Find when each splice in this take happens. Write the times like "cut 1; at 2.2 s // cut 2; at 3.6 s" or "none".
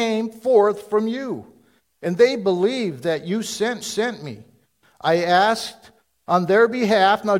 cut 1; at 3.8 s

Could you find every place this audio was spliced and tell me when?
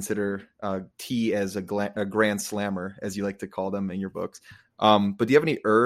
cut 1; at 0.9 s

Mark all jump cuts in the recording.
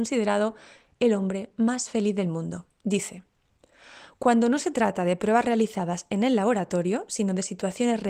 none

